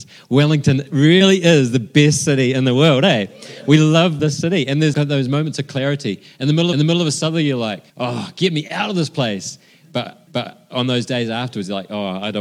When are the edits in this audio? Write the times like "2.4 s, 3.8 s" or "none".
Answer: 4.2 s, 4.9 s, 6.7 s, 7.9 s, 10.3 s